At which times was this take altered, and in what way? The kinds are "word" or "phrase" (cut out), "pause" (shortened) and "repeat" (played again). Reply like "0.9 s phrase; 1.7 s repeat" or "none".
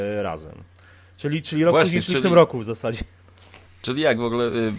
3.7 s pause